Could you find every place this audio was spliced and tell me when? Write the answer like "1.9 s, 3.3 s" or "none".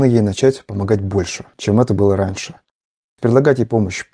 none